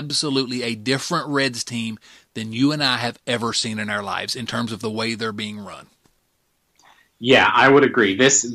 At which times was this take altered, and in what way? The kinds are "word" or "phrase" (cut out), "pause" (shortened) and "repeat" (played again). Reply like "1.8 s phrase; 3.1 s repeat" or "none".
none